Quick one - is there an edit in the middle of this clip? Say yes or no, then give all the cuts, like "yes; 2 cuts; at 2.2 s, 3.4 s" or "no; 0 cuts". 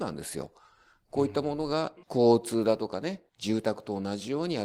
yes; 2 cuts; at 2.0 s, 3.3 s